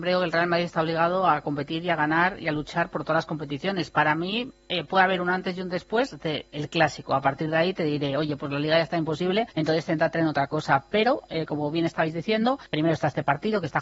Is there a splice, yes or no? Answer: yes